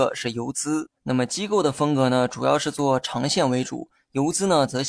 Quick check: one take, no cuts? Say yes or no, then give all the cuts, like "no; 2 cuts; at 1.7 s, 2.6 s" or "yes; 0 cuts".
no; 1 cut; at 1.0 s